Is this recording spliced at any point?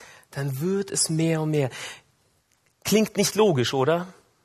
no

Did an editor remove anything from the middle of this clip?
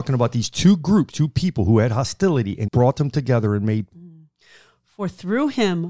yes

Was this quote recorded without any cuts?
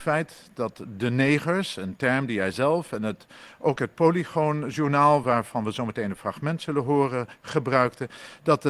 yes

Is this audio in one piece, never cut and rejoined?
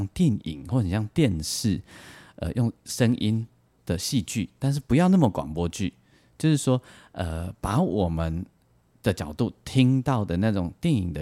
yes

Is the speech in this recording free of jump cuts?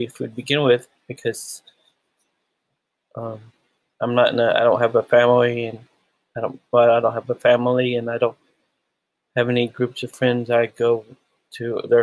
yes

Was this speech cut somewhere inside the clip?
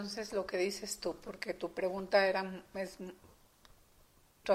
no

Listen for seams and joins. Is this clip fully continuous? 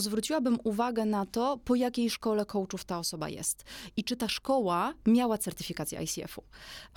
yes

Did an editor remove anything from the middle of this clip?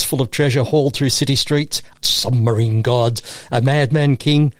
yes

